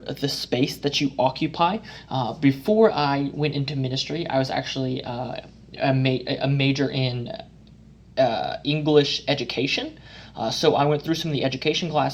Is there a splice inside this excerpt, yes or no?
no